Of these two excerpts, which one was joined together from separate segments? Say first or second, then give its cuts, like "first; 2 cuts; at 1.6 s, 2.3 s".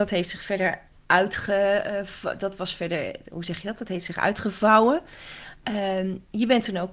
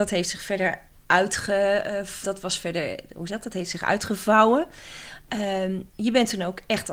second; 2 cuts; at 2.2 s, 3.3 s